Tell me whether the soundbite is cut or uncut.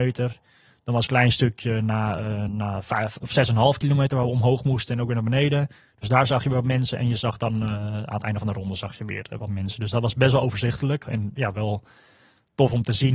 cut